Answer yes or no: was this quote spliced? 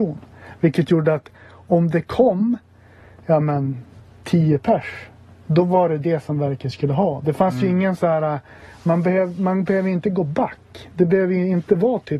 no